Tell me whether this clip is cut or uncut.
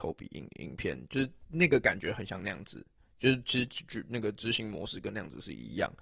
uncut